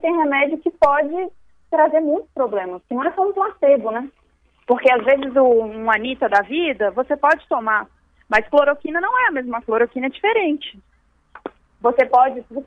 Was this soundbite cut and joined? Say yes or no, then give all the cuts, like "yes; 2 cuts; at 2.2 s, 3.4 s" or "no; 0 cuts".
yes; 1 cut; at 9.6 s